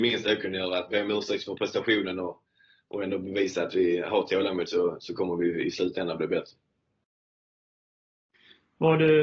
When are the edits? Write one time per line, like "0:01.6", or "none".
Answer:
none